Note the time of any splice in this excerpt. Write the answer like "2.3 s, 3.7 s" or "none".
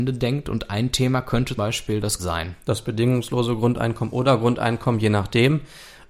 1.6 s, 2.2 s